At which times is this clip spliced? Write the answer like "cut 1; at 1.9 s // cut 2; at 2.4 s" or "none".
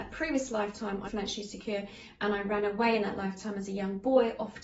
cut 1; at 1.0 s